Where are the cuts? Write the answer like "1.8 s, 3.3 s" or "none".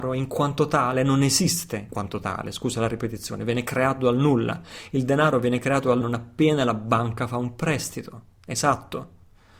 1.9 s, 6.0 s